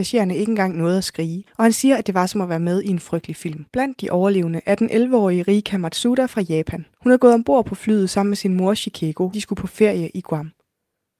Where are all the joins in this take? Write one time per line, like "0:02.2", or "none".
0:01.5
0:03.7
0:06.9
0:09.3